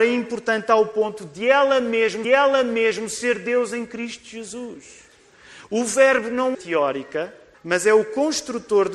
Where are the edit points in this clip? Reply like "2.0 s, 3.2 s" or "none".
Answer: 2.2 s, 6.5 s, 7.5 s